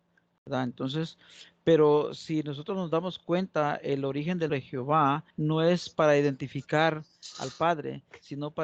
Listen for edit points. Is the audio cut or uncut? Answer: cut